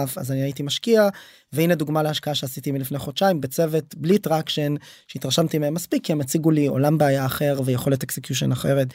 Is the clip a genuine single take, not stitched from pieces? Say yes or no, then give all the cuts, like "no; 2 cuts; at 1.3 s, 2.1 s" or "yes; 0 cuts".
yes; 0 cuts